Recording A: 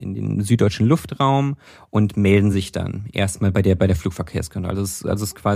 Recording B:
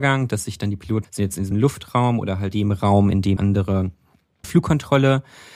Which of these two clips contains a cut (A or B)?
B